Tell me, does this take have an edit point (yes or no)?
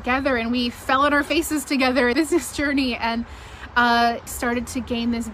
yes